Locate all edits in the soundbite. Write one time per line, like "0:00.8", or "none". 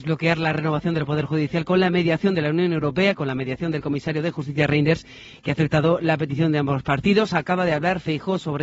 none